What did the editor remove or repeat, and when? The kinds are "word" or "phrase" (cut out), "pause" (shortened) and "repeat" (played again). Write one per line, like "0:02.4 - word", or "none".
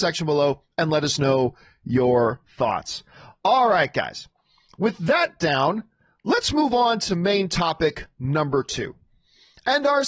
none